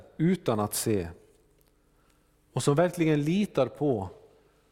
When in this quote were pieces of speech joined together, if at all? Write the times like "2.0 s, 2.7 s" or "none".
none